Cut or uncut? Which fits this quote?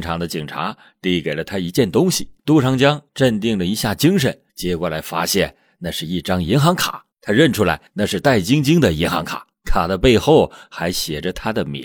cut